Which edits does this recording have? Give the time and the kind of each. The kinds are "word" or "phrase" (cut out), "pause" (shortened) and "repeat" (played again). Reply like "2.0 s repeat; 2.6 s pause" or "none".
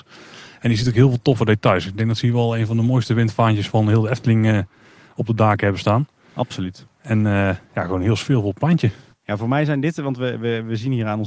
none

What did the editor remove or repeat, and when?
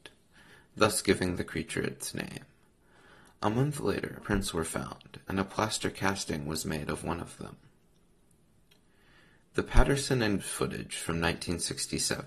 4.2 s word; 10.4 s word

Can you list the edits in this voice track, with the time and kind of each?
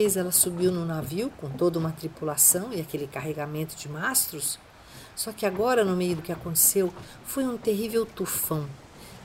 6.2 s word

